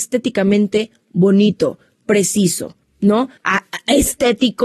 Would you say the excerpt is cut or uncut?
cut